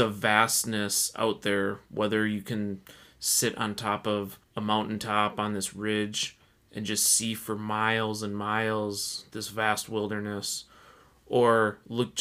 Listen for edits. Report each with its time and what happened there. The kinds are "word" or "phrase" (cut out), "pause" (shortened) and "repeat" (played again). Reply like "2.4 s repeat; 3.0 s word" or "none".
none

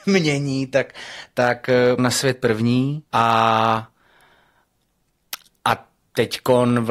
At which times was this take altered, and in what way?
2.0 s word; 3.1 s pause

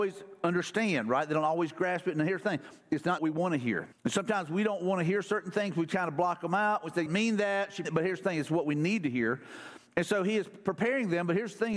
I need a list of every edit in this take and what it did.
3.2 s phrase; 3.9 s pause; 7.1 s phrase; 7.8 s phrase

